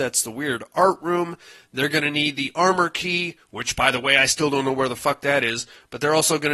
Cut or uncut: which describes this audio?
uncut